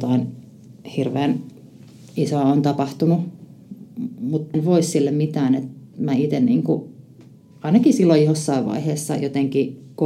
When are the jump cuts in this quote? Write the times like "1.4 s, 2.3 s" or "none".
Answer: 4.5 s